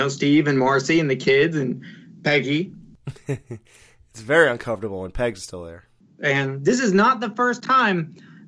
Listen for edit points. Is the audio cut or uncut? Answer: uncut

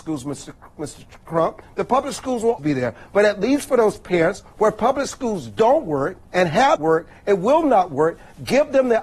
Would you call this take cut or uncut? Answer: cut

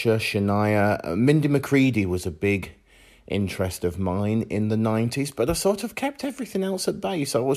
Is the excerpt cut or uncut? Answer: uncut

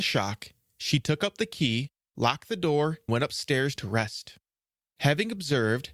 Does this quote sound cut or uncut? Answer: cut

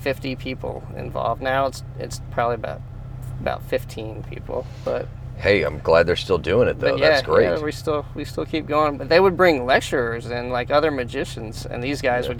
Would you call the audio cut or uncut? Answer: uncut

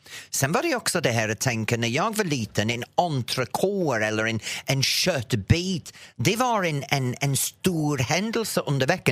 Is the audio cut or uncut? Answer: uncut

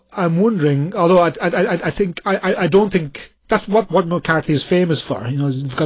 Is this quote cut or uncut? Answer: cut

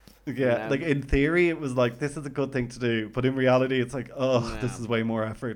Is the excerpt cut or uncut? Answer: uncut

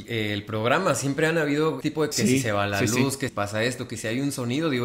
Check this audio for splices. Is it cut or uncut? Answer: cut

